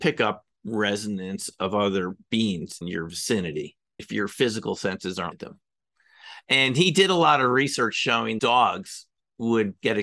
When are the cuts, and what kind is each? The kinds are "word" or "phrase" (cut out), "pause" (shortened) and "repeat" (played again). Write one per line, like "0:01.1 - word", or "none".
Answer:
0:02.8 - word
0:04.0 - word
0:05.3 - word
0:08.4 - word